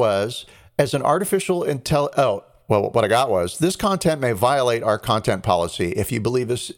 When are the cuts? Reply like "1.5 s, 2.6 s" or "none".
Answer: none